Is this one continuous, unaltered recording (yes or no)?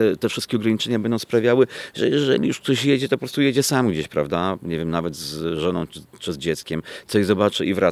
yes